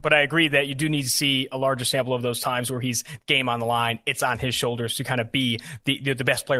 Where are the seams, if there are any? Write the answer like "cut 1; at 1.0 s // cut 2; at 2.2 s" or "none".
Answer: none